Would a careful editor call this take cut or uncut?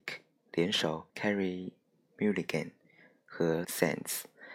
cut